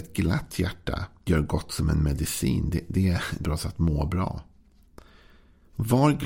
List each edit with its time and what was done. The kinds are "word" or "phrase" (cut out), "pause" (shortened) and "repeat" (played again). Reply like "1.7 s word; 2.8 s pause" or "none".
1.3 s word; 3.4 s word